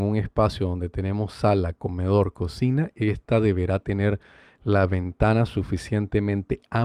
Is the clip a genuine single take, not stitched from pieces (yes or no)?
yes